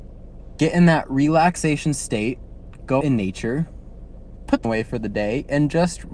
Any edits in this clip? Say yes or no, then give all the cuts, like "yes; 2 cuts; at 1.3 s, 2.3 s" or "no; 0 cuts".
yes; 2 cuts; at 3.0 s, 4.6 s